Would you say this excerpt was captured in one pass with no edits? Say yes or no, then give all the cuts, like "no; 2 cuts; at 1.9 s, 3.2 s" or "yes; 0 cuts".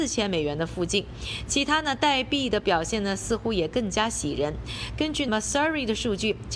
no; 1 cut; at 5.3 s